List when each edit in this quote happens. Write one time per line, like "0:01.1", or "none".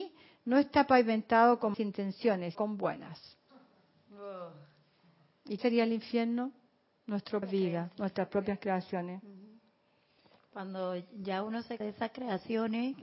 0:01.7
0:02.5
0:05.6
0:07.4
0:07.9
0:11.8

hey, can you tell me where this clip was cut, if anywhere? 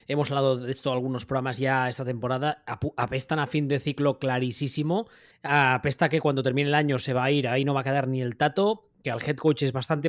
0:05.3

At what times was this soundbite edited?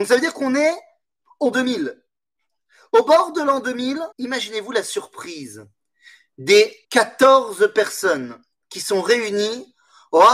0:01.5
0:04.1
0:06.8

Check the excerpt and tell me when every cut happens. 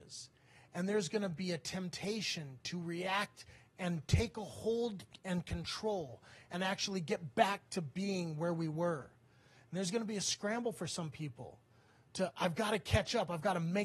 none

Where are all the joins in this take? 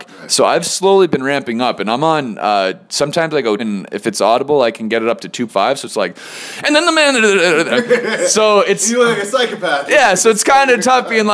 0:03.6
0:05.5

